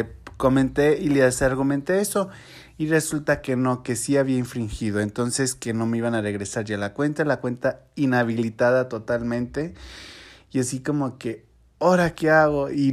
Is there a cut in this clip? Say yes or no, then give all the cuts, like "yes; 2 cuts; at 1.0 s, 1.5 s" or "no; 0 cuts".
no; 0 cuts